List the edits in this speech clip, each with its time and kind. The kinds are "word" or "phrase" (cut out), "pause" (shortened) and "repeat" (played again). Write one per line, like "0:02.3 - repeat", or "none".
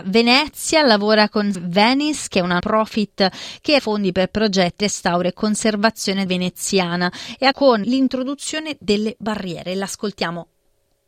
0:01.5 - word
0:02.6 - word
0:03.8 - word
0:04.8 - word
0:06.3 - word
0:07.5 - word
0:07.8 - word